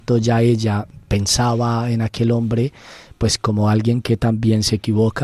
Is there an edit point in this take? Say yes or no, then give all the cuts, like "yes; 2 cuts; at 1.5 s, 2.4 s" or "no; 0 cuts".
no; 0 cuts